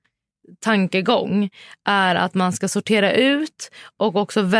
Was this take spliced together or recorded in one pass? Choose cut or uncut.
uncut